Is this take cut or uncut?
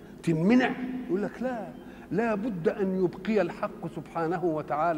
uncut